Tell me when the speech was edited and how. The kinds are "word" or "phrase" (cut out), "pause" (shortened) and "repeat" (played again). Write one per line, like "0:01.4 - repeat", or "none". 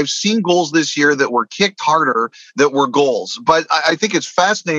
none